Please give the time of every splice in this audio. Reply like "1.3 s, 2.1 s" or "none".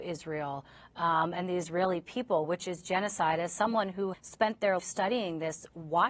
4.1 s, 4.8 s